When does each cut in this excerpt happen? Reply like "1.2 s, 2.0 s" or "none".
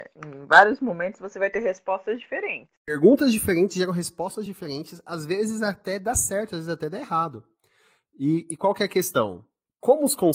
none